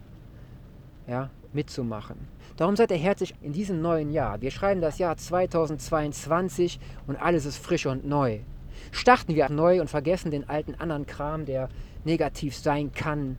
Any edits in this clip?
yes; 3 cuts; at 1.5 s, 3.4 s, 9.5 s

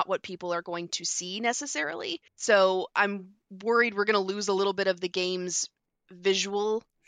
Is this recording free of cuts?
no; 1 cut; at 2.3 s

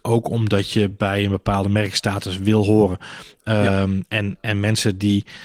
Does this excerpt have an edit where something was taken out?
no; 0 cuts

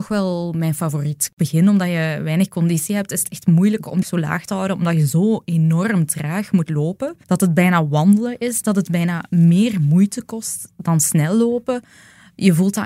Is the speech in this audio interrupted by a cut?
yes; 2 cuts; at 4.0 s, 7.2 s

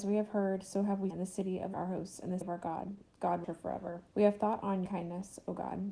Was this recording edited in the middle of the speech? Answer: yes; 6 cuts; at 1.1 s, 1.7 s, 2.4 s, 3.4 s, 4.1 s, 4.9 s

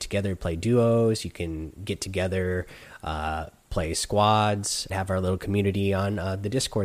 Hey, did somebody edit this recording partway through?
yes; 1 cut; at 4.9 s

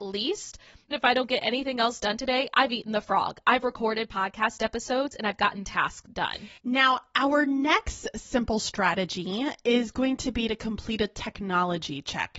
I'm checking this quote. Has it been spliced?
yes; 3 cuts; at 0.9 s, 5.6 s, 6.6 s

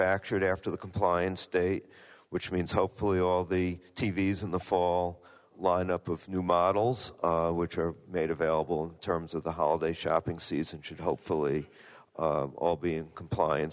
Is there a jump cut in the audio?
no; 0 cuts

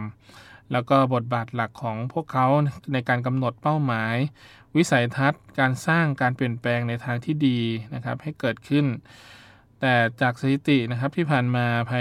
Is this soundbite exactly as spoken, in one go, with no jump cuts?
yes; 0 cuts

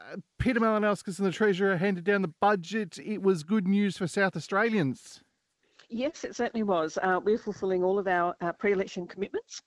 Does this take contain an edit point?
no; 0 cuts

